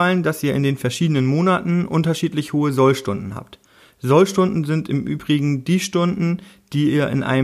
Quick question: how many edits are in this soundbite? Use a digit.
0